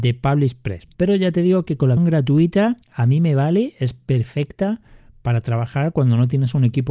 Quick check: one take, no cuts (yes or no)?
no